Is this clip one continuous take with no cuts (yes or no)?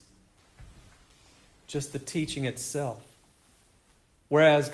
yes